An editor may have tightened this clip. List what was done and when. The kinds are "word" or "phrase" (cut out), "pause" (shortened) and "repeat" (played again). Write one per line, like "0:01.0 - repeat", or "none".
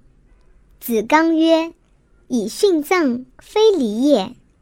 0:03.3 - pause